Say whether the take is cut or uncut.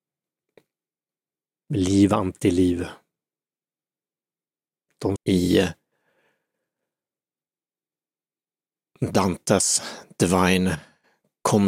cut